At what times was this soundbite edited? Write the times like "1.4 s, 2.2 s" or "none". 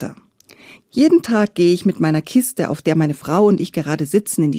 none